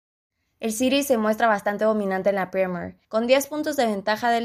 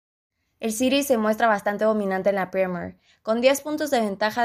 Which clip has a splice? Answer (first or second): first